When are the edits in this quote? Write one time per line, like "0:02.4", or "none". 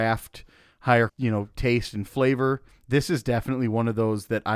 0:01.1
0:02.7

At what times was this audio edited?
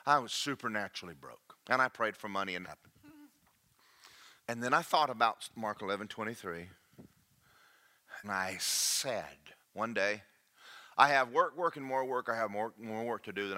0:01.6
0:02.6
0:04.4
0:08.2
0:09.6

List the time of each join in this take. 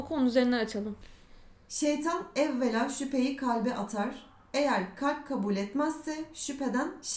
none

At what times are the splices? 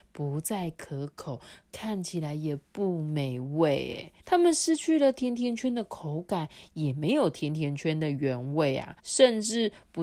0:04.2
0:09.0

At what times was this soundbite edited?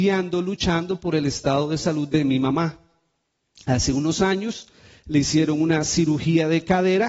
none

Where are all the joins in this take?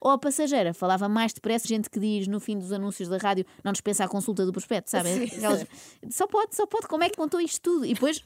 0:01.6
0:07.1

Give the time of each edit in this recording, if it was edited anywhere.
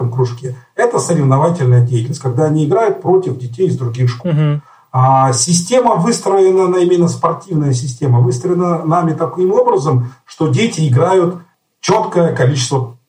none

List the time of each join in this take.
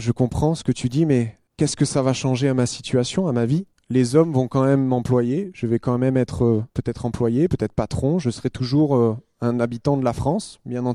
0:01.5
0:03.7
0:06.7

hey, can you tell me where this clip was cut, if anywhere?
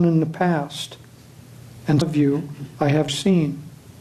0:02.0
0:03.1

